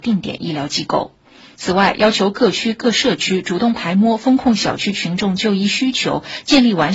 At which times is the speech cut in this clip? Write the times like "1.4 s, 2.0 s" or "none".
none